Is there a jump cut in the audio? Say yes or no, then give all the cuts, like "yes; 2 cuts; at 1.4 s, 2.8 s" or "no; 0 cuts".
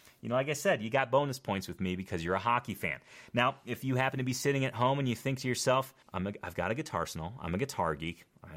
yes; 1 cut; at 6.0 s